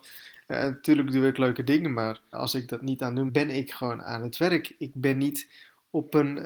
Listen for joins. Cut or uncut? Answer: cut